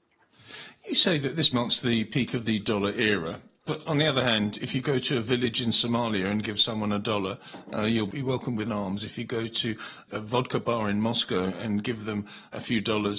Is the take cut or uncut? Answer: cut